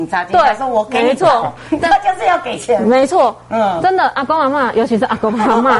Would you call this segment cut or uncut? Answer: cut